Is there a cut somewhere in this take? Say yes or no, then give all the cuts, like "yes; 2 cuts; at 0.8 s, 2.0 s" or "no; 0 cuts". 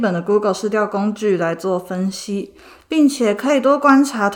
no; 0 cuts